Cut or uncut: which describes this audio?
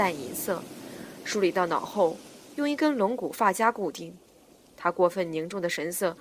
uncut